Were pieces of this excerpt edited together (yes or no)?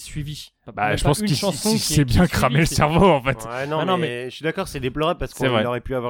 no